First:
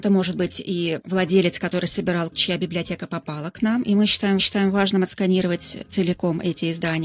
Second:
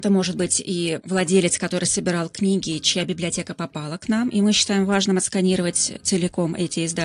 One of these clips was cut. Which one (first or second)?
first